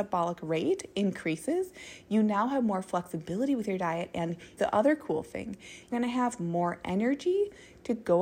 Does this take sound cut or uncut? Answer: cut